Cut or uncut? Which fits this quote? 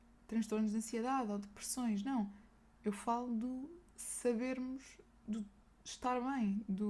uncut